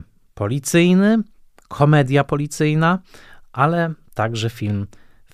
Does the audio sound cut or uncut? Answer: uncut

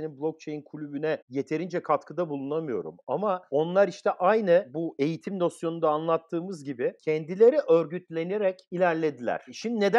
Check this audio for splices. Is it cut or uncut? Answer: cut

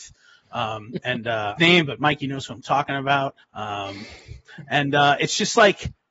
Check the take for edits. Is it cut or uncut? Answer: cut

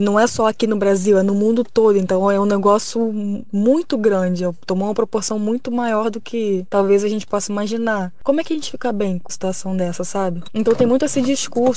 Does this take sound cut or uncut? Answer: cut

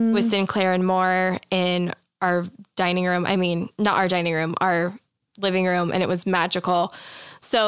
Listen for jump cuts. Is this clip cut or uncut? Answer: uncut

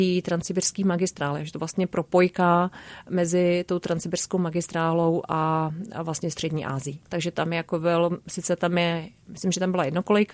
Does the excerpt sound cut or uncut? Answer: cut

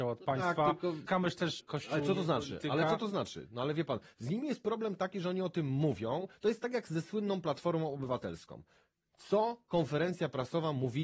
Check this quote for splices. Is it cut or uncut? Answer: cut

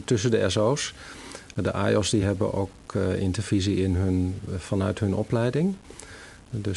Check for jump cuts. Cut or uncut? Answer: uncut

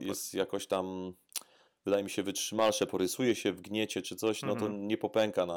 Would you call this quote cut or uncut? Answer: uncut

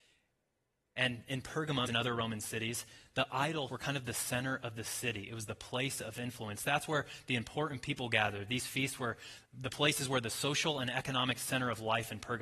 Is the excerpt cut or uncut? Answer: cut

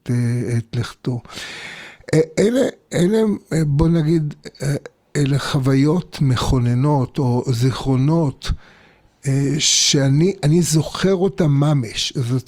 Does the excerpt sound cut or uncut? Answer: uncut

